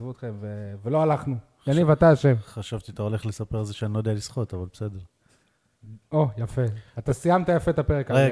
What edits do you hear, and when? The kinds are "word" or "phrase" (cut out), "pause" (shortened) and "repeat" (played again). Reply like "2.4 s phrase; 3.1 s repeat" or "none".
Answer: none